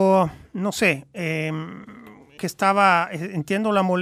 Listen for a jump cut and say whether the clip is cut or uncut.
cut